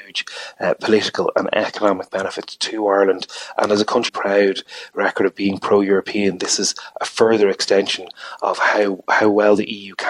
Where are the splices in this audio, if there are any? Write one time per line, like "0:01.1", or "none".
0:04.1

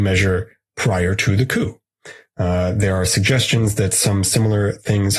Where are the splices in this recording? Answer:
none

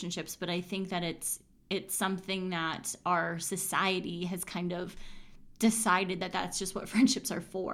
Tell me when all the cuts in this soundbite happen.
none

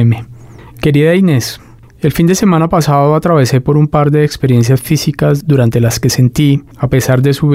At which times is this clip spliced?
none

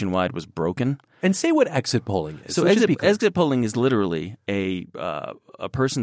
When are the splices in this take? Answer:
none

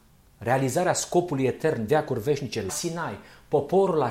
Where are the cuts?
0:01.9
0:02.7

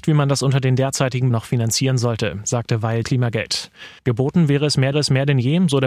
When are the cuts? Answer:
0:01.3
0:03.0
0:04.0
0:04.9

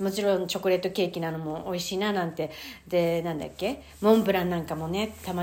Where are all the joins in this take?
none

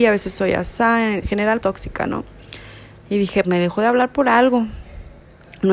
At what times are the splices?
0:01.2
0:01.6
0:03.4

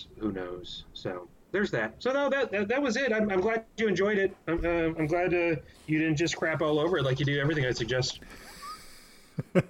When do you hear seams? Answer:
none

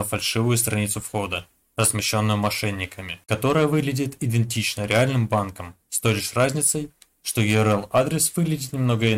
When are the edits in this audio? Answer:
none

